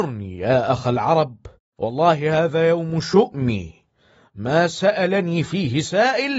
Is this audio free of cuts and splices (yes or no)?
yes